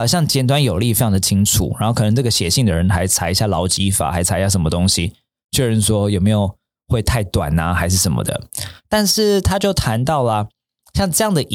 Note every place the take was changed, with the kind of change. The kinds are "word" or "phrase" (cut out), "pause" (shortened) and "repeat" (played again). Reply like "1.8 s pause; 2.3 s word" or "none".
none